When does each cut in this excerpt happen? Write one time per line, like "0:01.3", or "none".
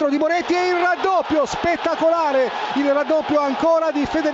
none